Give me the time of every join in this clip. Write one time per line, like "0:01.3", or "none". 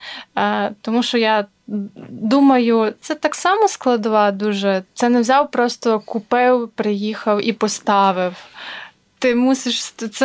0:03.0